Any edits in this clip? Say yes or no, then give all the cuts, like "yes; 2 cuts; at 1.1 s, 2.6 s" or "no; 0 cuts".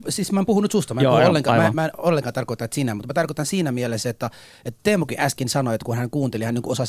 no; 0 cuts